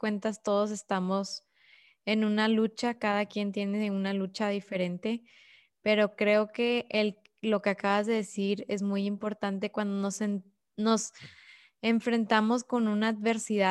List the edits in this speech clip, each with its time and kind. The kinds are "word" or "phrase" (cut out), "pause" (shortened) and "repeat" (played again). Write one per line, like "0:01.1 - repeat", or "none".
none